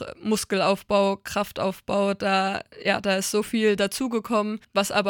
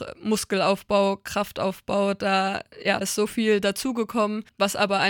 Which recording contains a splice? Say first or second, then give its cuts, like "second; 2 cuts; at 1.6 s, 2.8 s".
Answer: second; 1 cut; at 3.0 s